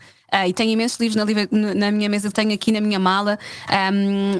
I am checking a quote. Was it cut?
yes; 1 cut; at 2.3 s

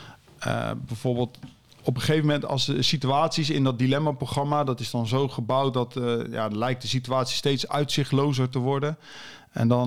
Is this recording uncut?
yes; 0 cuts

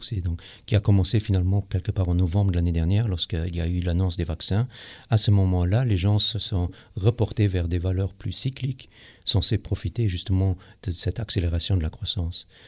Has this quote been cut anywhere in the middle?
no; 0 cuts

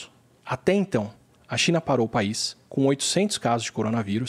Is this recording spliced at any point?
no; 0 cuts

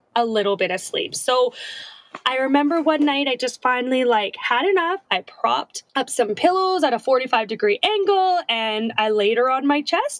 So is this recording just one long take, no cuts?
no; 1 cut; at 5.9 s

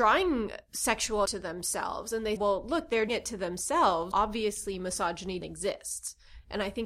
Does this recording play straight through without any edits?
no; 5 cuts; at 1.2 s, 2.4 s, 3.1 s, 4.1 s, 5.4 s

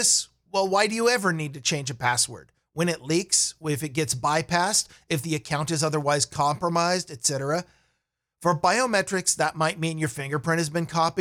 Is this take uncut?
yes; 0 cuts

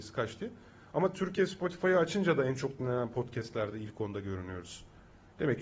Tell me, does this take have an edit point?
no; 0 cuts

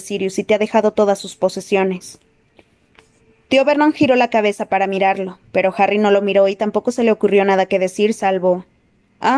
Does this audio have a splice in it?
no; 0 cuts

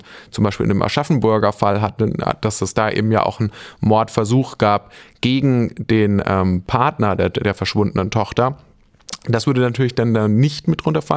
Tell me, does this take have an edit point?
no; 0 cuts

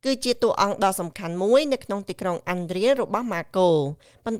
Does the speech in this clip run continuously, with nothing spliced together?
yes; 0 cuts

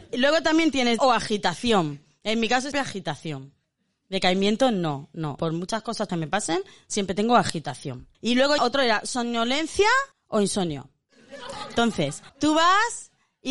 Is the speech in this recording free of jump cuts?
no; 8 cuts; at 1.0 s, 2.7 s, 5.4 s, 6.1 s, 8.1 s, 8.6 s, 10.1 s, 12.3 s

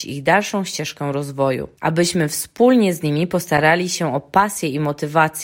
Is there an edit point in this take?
no; 0 cuts

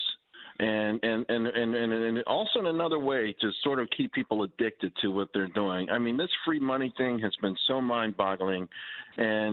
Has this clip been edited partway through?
no; 0 cuts

